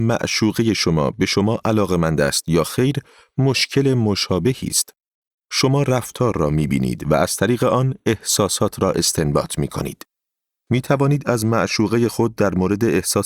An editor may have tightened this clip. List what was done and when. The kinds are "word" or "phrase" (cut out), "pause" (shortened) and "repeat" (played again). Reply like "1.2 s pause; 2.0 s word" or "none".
none